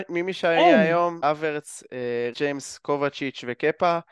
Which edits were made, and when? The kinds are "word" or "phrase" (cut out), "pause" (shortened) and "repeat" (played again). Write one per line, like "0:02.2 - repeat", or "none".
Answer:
0:01.2 - word
0:02.3 - word